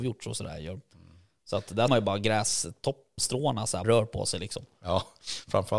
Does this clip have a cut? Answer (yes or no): yes